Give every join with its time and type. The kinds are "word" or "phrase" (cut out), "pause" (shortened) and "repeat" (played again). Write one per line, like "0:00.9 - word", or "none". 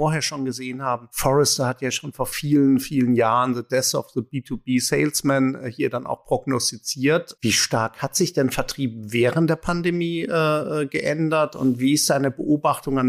none